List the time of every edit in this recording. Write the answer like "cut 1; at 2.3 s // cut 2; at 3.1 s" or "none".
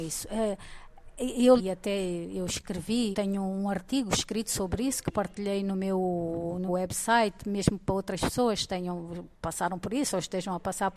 cut 1; at 1.6 s // cut 2; at 3.1 s // cut 3; at 6.7 s